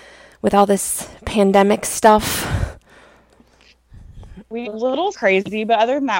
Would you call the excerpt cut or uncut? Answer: cut